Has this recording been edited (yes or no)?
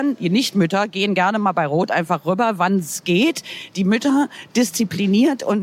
no